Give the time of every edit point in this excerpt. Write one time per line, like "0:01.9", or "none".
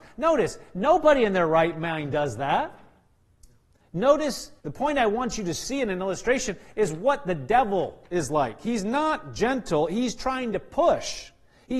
0:04.6
0:08.1